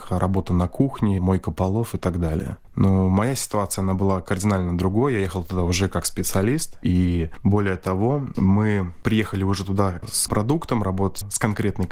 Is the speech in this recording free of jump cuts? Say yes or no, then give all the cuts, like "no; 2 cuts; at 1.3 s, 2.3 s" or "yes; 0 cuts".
no; 1 cut; at 10.3 s